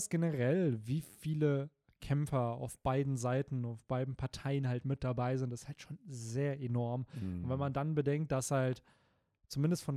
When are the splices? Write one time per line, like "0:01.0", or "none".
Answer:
none